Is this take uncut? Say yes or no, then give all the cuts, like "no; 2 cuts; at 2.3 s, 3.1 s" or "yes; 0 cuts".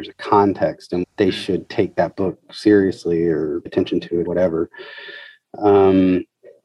no; 3 cuts; at 1.0 s, 3.7 s, 4.3 s